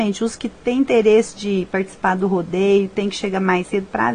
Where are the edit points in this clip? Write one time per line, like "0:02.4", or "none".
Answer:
none